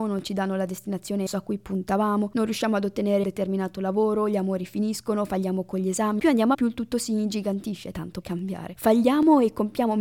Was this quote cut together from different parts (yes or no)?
yes